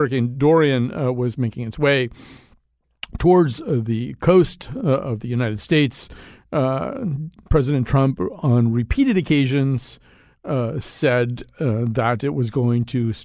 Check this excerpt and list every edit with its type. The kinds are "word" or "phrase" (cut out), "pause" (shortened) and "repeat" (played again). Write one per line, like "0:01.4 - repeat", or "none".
none